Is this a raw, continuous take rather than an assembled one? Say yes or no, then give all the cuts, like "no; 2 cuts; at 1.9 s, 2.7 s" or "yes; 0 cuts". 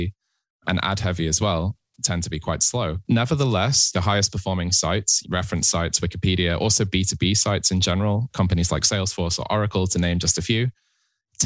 no; 1 cut; at 3.0 s